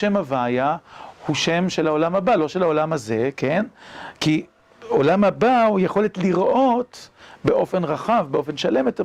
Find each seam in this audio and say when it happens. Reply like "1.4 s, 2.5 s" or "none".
none